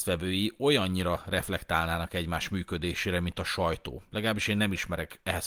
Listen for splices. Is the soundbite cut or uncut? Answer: uncut